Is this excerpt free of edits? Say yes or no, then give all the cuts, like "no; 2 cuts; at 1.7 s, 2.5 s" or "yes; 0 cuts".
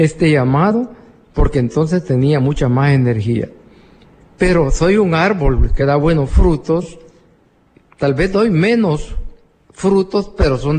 yes; 0 cuts